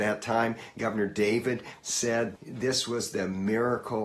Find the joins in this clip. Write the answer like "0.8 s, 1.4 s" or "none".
1.8 s, 2.4 s